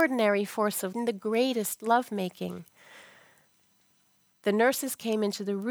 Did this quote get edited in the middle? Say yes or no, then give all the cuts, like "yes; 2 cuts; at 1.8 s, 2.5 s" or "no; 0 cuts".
yes; 1 cut; at 0.9 s